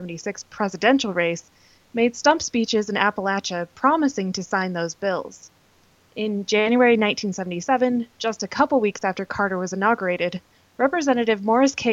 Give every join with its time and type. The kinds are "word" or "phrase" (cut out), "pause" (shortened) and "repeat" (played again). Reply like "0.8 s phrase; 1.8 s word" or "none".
none